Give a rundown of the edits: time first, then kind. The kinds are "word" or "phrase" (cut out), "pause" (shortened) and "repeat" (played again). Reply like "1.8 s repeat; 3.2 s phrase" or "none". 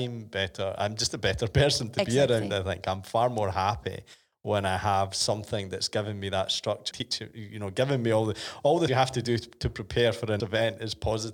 6.9 s word; 8.9 s word; 10.4 s word